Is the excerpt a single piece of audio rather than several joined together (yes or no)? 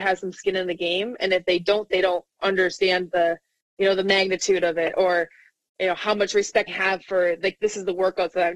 no